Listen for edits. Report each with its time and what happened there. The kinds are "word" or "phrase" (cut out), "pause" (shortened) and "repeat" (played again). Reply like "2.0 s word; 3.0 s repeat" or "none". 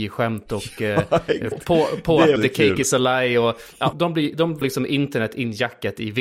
1.5 s word; 2.4 s word; 3.9 s word; 4.6 s word